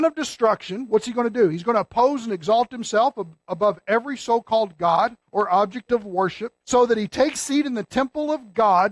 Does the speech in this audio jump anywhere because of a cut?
yes; 3 cuts; at 5.2 s, 6.6 s, 7.4 s

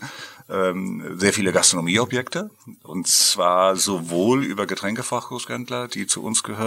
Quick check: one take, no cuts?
yes; 0 cuts

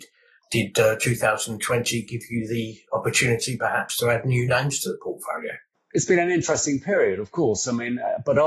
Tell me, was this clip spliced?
no; 0 cuts

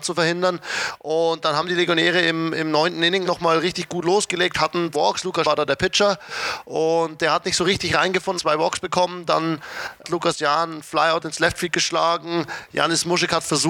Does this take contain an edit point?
yes; 5 cuts; at 3.2 s, 4.9 s, 5.4 s, 8.4 s, 10.0 s

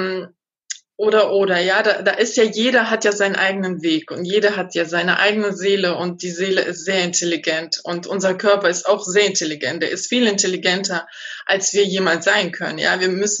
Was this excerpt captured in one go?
yes; 0 cuts

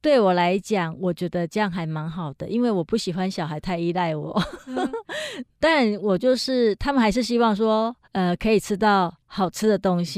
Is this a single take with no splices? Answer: no; 1 cut; at 8.0 s

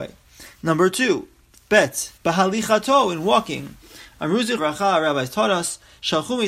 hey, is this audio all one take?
no; 2 cuts; at 2.2 s, 4.6 s

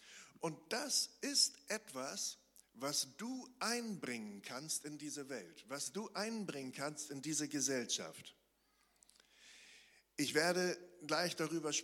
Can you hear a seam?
no; 0 cuts

